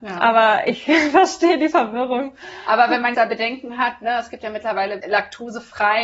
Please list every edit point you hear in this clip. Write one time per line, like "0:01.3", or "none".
0:03.1
0:05.0